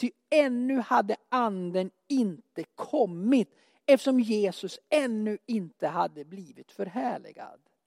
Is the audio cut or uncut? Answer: uncut